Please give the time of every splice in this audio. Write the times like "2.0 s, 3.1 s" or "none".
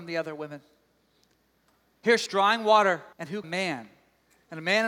2.3 s, 3.1 s, 3.4 s